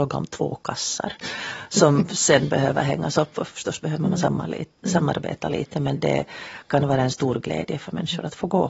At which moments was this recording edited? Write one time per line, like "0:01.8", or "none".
0:06.0